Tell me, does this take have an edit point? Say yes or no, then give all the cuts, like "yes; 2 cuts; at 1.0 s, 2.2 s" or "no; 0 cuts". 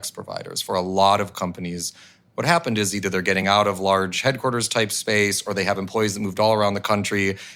no; 0 cuts